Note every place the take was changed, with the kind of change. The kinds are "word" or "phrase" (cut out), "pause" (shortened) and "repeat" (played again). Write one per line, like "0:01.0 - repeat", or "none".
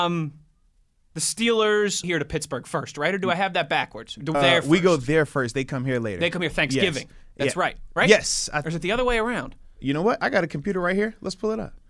0:02.0 - phrase
0:04.3 - word

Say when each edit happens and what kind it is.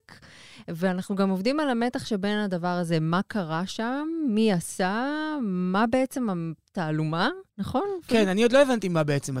0:07.5 - pause

